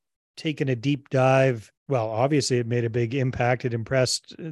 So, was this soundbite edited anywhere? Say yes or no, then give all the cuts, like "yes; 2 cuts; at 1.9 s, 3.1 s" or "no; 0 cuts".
yes; 1 cut; at 1.8 s